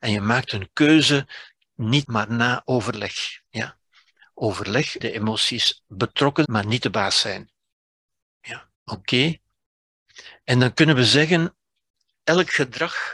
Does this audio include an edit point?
yes; 5 cuts; at 2.0 s, 3.5 s, 5.0 s, 6.4 s, 8.7 s

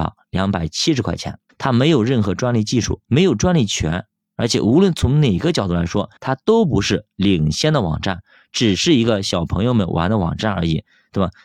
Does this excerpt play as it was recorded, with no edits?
no; 3 cuts; at 1.5 s, 3.0 s, 6.2 s

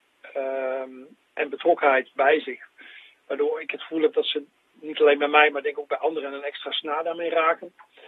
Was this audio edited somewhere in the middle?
yes; 1 cut; at 4.7 s

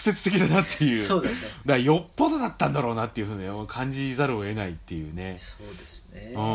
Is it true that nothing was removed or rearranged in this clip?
no; 1 cut; at 1.6 s

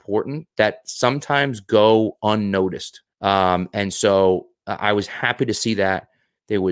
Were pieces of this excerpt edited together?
yes; 1 cut; at 3.1 s

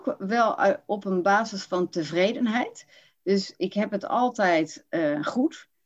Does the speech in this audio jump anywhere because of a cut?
no; 0 cuts

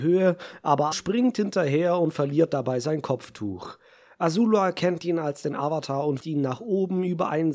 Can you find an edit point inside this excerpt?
yes; 2 cuts; at 0.9 s, 6.2 s

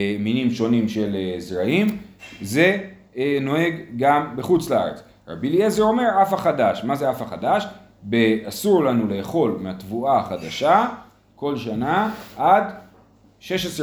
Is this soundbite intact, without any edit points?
yes; 0 cuts

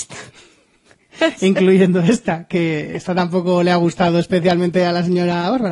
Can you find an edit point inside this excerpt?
no; 0 cuts

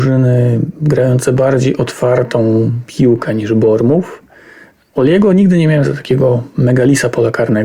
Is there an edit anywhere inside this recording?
no; 0 cuts

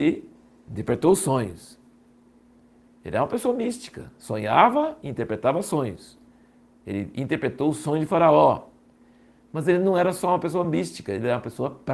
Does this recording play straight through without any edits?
yes; 0 cuts

